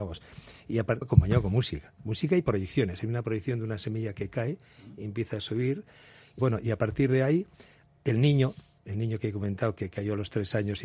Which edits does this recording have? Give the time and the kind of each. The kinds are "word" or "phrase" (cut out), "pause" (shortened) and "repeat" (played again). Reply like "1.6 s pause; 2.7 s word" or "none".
1.0 s phrase; 6.4 s word